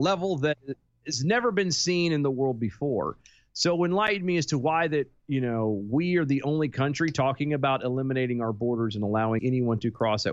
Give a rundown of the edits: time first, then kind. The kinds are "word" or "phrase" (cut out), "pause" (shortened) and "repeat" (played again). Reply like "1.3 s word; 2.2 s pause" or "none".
9.4 s word